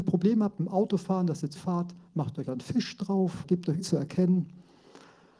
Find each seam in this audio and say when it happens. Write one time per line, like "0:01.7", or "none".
0:01.6
0:02.5
0:03.4
0:03.8